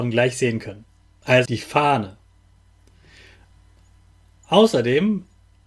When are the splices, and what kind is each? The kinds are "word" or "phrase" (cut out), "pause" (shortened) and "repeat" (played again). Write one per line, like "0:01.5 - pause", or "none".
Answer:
0:01.5 - word